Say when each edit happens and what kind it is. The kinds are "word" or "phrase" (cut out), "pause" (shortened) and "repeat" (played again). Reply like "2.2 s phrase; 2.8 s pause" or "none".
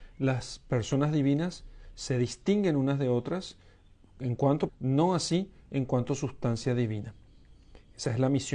4.7 s word